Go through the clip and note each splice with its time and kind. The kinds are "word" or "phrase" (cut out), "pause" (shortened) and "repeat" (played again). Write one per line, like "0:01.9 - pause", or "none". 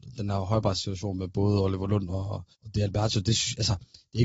0:02.5 - pause